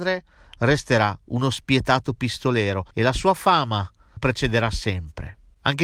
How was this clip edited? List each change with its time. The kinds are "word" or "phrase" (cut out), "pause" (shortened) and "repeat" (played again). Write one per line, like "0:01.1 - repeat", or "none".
0:02.9 - pause
0:04.2 - phrase